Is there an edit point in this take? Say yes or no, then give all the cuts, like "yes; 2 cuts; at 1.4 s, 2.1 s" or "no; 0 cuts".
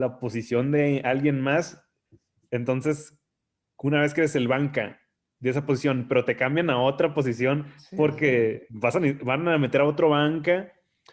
no; 0 cuts